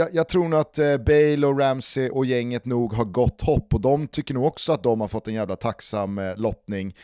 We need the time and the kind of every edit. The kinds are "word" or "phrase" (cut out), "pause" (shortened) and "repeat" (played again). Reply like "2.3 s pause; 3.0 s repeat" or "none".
2.1 s word